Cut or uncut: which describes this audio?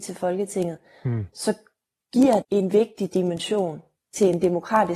cut